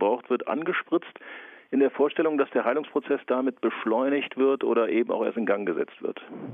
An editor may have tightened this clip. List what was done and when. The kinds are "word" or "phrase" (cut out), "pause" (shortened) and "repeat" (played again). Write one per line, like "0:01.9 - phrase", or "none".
none

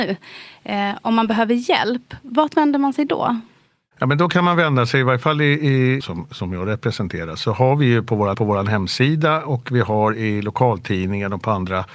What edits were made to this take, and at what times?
0:06.0 - phrase
0:08.3 - repeat

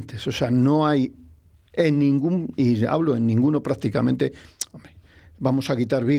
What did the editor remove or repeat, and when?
none

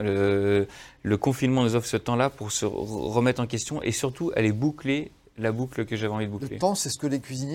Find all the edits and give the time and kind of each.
none

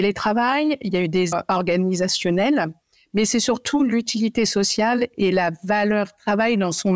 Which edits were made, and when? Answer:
0:01.3 - word

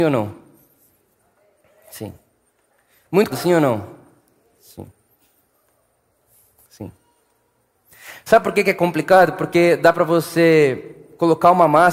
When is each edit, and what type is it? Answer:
0:03.3 - word

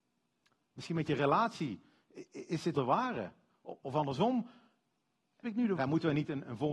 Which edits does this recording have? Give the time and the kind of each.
0:02.7 - word
0:05.4 - word
0:05.8 - word

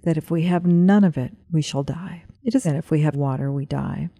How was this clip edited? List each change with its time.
0:01.4 - pause
0:02.3 - pause
0:02.6 - phrase
0:03.1 - word

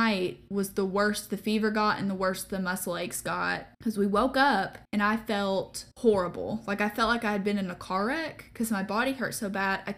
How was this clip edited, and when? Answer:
0:03.7 - pause
0:04.8 - pause
0:05.9 - pause

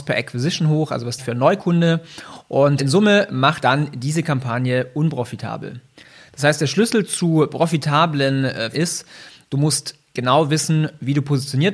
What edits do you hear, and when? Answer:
0:01.2 - word
0:02.8 - word
0:03.6 - word
0:08.7 - word

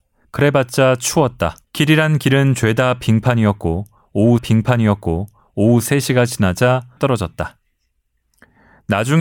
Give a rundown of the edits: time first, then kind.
0:01.6 - pause
0:04.4 - repeat
0:07.0 - word

